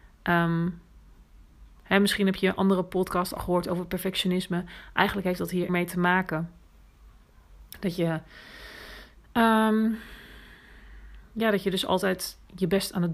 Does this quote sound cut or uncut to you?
cut